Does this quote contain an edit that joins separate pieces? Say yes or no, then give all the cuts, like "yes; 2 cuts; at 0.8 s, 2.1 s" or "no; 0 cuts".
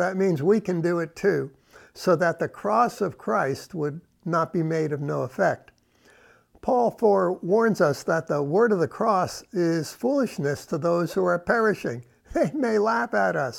no; 0 cuts